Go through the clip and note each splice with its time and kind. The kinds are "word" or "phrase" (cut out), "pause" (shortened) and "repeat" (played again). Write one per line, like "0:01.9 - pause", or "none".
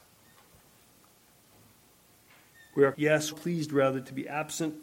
0:02.9 - word
0:03.3 - word